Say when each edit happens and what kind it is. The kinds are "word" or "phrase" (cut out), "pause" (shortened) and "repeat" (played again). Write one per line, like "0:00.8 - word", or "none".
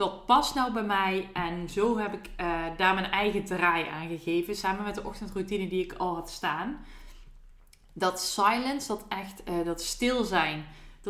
none

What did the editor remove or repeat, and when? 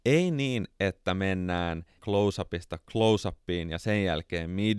0:02.0 - word

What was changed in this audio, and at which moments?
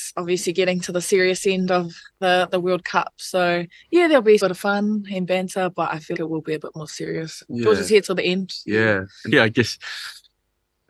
0:02.1 - pause
0:04.4 - phrase
0:06.1 - word
0:09.3 - word

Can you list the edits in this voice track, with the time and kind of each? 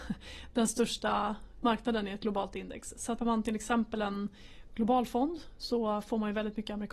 0:03.2 - word

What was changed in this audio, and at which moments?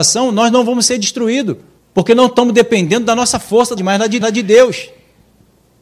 0:01.8 - pause
0:03.8 - phrase
0:04.2 - repeat

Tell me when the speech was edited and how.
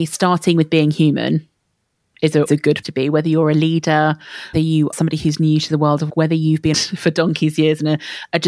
0:02.5 - word
0:02.8 - word
0:04.5 - word
0:04.9 - word
0:06.1 - word
0:06.7 - word

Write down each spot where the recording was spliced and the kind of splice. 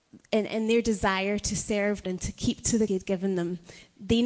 0:02.0 - word
0:02.9 - word

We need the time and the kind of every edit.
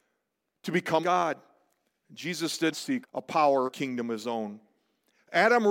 0:01.0 - word
0:02.7 - word
0:03.0 - word
0:03.7 - word

